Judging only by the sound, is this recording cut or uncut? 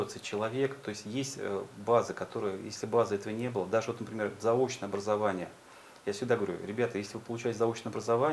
uncut